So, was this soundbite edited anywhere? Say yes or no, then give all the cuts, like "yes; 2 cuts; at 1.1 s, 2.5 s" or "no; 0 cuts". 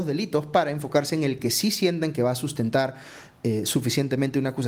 no; 0 cuts